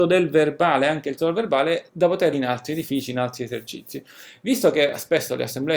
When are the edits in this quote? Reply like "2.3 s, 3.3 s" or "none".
1.2 s, 1.9 s, 2.3 s